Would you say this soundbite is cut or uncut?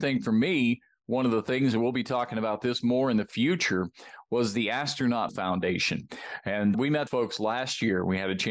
cut